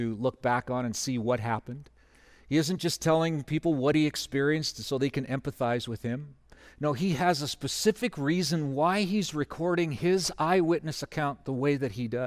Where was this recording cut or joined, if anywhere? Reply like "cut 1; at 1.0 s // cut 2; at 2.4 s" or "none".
none